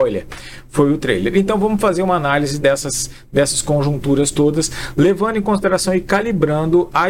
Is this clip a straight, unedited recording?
yes; 0 cuts

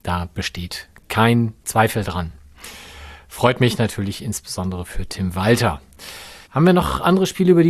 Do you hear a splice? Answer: yes; 2 cuts; at 1.6 s, 6.4 s

